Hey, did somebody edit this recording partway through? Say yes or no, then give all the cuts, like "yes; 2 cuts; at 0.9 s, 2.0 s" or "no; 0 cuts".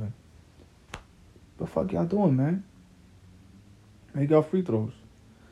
no; 0 cuts